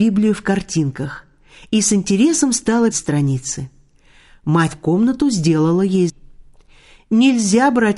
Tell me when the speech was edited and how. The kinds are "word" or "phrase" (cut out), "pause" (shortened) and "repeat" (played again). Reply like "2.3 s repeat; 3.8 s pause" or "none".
2.9 s word; 4.7 s word; 6.1 s word